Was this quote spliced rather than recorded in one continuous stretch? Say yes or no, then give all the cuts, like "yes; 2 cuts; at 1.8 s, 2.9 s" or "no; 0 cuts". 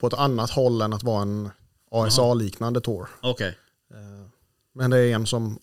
no; 0 cuts